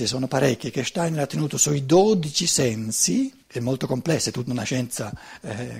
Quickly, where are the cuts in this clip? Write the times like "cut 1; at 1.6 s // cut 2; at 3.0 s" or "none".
cut 1; at 3.4 s